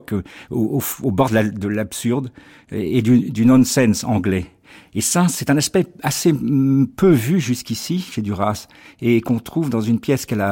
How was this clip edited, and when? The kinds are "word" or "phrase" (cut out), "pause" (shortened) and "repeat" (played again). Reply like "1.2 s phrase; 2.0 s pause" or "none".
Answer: none